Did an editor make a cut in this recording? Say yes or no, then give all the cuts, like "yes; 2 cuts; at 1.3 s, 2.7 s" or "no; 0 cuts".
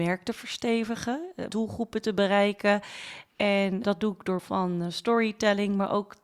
yes; 3 cuts; at 1.5 s, 3.8 s, 4.4 s